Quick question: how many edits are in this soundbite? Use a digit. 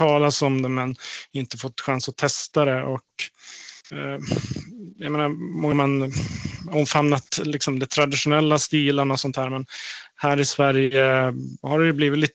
3